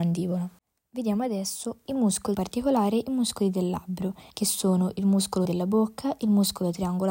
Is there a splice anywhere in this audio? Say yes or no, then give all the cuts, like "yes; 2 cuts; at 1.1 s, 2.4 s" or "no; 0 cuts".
yes; 3 cuts; at 2.3 s, 4.3 s, 5.4 s